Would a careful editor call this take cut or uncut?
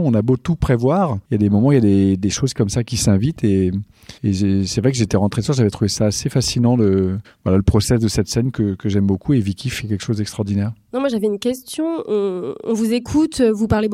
cut